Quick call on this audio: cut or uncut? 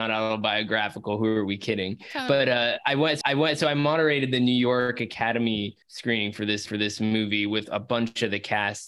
cut